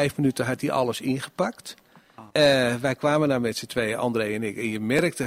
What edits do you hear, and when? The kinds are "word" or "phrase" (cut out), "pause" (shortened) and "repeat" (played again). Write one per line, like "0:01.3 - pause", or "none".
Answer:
0:02.3 - pause